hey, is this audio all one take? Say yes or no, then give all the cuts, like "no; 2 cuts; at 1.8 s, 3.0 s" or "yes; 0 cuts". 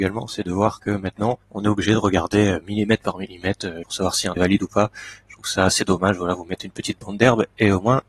no; 3 cuts; at 1.4 s, 3.8 s, 4.4 s